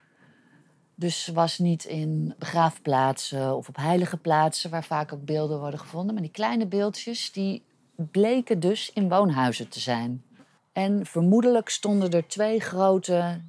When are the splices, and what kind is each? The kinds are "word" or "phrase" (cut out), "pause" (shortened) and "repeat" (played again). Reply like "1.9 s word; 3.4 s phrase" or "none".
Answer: none

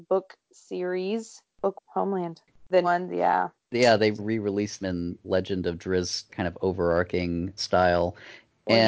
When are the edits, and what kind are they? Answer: 1.8 s word; 2.8 s word; 4.2 s word; 4.8 s word; 5.2 s word; 6.3 s word; 7.6 s word

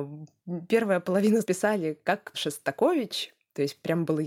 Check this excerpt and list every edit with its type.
1.4 s word; 2.3 s word

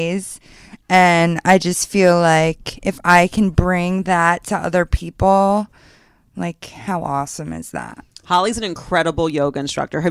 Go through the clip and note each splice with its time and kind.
none

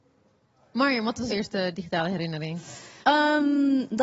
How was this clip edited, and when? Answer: 1.3 s word; 3.0 s pause

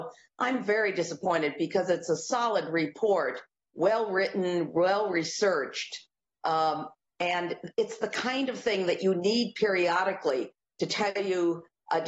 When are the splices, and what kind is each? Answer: none

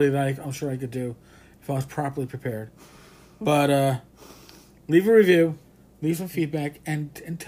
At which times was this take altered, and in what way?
none

